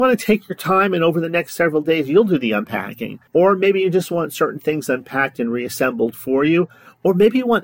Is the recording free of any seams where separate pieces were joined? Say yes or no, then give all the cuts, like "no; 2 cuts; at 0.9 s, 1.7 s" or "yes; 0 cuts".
no; 1 cut; at 3.3 s